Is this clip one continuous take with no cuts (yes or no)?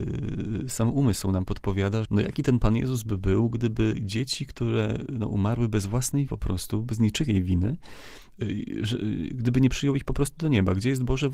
no